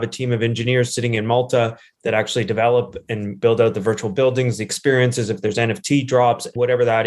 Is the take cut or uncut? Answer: uncut